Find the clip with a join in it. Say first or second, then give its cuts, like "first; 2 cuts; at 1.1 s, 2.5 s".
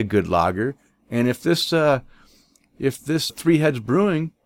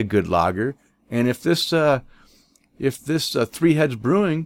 first; 1 cut; at 3.3 s